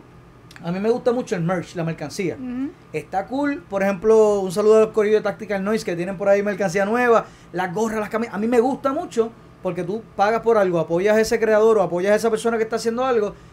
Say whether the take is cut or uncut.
uncut